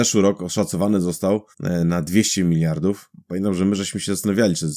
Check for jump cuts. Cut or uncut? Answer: cut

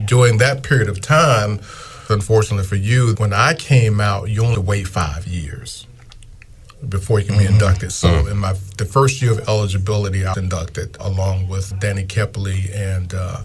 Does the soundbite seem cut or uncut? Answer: cut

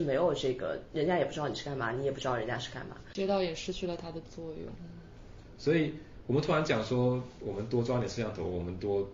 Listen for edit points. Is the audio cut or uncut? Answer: cut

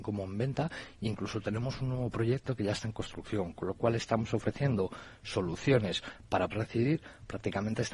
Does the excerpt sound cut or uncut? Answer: cut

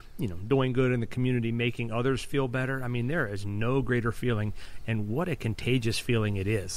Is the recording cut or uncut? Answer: uncut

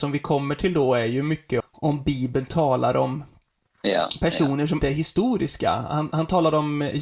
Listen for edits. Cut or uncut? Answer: cut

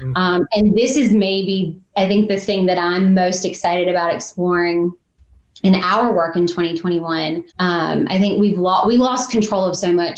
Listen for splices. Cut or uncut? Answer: cut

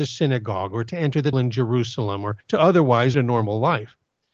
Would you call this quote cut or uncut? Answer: cut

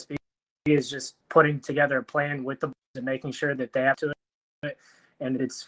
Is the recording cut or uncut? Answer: cut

